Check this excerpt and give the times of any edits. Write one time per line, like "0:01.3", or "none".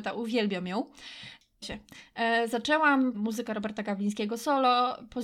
0:01.6
0:03.1